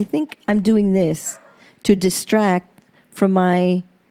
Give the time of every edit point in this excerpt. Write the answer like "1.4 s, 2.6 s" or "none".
none